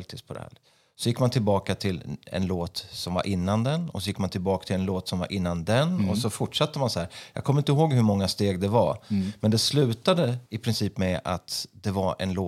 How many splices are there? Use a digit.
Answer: 1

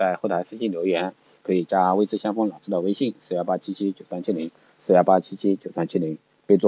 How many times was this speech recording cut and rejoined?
0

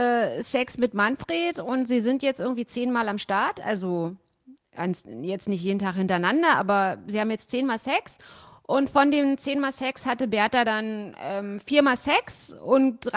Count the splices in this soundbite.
0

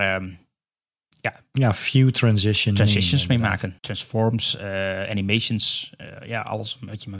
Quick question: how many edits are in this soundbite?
1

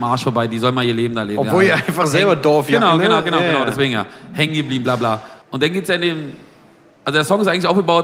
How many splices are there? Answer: 1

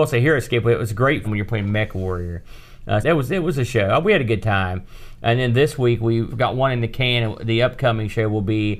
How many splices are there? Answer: 3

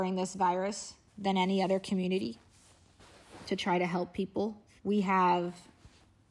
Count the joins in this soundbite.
2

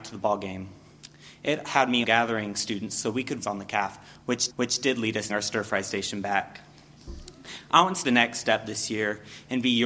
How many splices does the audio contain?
5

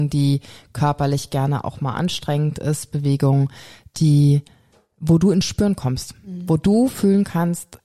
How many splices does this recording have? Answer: 0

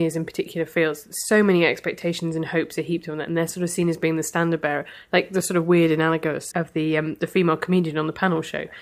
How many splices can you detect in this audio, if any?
1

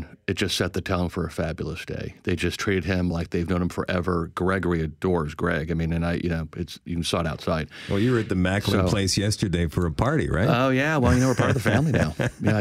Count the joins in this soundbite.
0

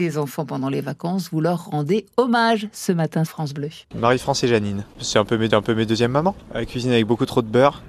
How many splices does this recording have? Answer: 3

